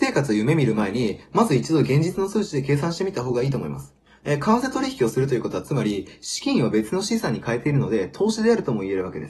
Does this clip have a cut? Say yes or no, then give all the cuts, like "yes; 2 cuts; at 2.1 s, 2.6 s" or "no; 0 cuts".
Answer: no; 0 cuts